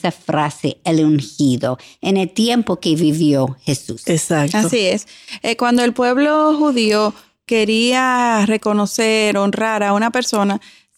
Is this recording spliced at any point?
no; 0 cuts

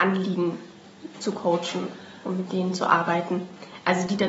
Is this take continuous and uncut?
yes; 0 cuts

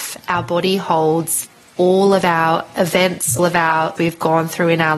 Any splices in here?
yes; 2 cuts; at 3.4 s, 4.0 s

